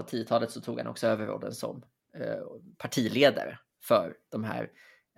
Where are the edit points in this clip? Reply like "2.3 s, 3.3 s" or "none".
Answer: none